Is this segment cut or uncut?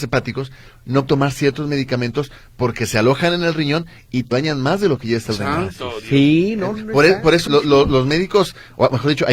cut